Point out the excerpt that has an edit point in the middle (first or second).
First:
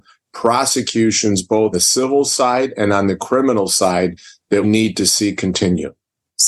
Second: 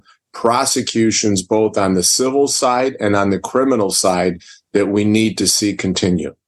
first